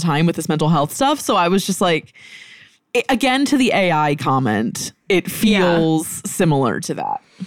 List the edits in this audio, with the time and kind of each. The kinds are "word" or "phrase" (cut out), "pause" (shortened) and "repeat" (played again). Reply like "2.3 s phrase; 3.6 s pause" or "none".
none